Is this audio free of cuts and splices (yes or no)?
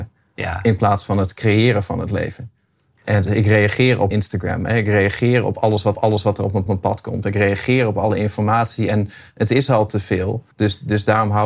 no